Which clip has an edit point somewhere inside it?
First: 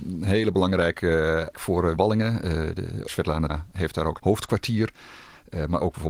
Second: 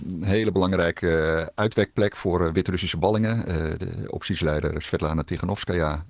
first; 5 cuts; at 1.5 s, 2.0 s, 3.1 s, 3.5 s, 4.2 s

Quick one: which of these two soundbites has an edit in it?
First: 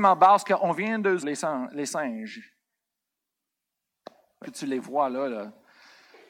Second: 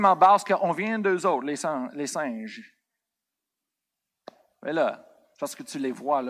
first; 2 cuts; at 1.2 s, 4.4 s

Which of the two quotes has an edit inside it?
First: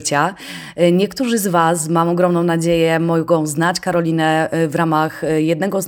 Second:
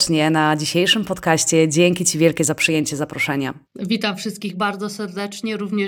second; 1 cut; at 3.6 s

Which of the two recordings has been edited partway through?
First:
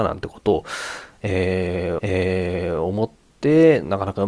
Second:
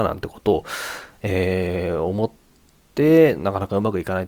first; 2 cuts; at 2.0 s, 3.3 s

